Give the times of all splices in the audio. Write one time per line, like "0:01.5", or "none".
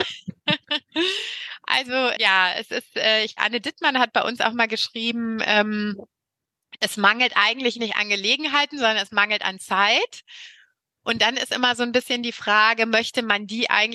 0:02.2
0:03.4